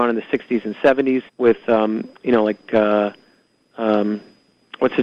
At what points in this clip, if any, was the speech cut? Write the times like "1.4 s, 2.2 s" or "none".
1.3 s

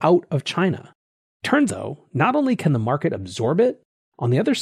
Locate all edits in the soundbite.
1.7 s

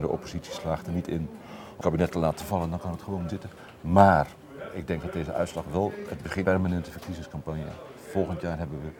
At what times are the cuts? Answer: 1.8 s, 3.3 s, 6.4 s

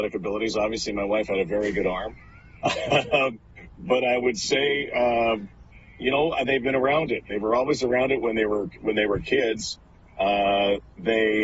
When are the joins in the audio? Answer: none

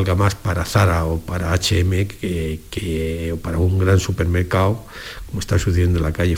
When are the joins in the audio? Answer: none

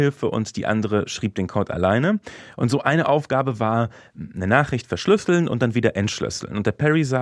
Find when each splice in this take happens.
none

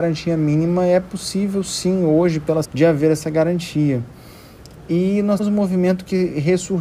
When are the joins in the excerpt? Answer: 2.6 s, 5.4 s

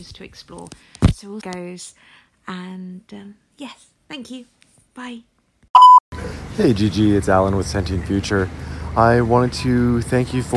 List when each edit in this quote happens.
1.4 s

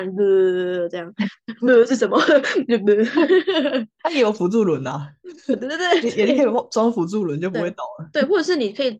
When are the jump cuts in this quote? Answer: none

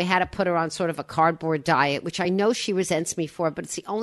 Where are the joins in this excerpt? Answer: none

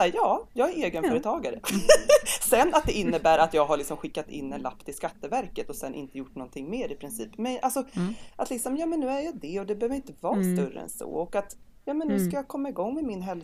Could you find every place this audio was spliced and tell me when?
none

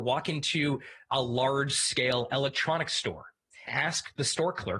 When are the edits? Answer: 3.7 s

